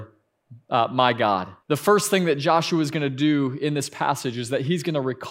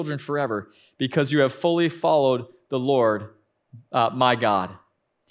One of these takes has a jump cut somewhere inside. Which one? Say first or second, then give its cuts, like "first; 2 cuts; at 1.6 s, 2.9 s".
first; 1 cut; at 1.6 s